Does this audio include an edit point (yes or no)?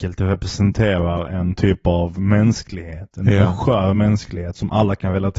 no